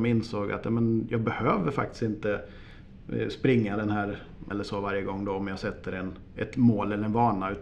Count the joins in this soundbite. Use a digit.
1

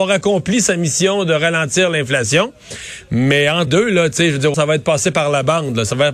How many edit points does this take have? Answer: 2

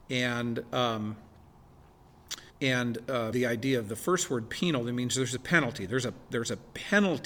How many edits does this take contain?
2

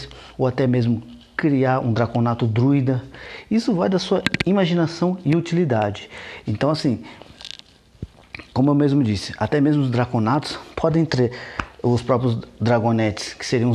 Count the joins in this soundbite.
0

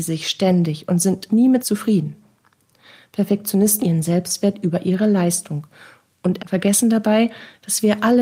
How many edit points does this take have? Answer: 4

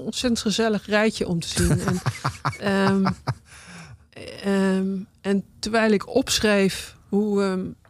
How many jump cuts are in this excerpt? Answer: 0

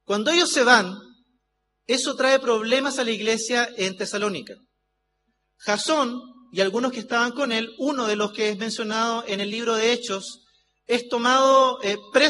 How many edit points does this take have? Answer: 0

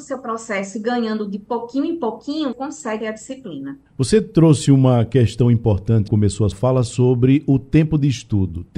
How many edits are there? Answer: 5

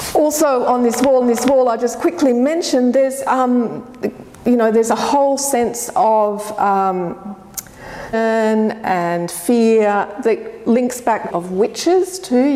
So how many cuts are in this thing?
4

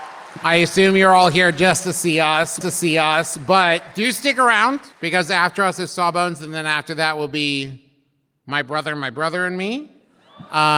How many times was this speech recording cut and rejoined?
2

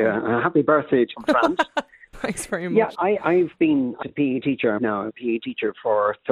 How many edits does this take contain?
6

